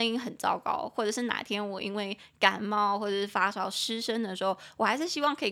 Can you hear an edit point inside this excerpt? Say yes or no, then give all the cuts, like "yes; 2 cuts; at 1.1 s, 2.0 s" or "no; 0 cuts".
no; 0 cuts